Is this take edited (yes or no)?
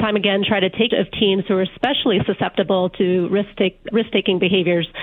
yes